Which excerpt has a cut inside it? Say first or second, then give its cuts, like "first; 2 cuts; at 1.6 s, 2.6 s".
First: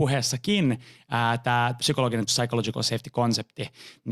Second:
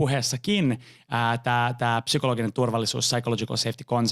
first; 2 cuts; at 1.8 s, 2.3 s